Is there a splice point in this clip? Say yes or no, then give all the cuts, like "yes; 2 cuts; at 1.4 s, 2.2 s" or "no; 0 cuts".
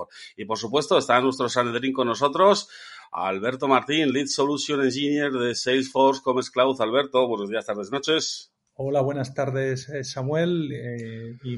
no; 0 cuts